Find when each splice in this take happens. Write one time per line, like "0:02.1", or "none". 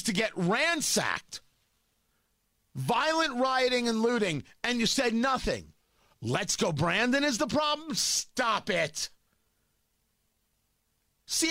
none